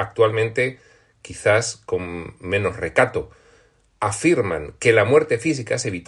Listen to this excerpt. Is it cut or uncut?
uncut